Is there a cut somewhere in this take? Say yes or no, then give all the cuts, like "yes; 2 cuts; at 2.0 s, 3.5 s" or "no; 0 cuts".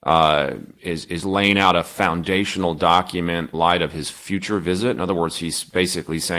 yes; 1 cut; at 3.5 s